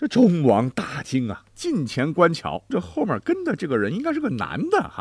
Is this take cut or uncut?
cut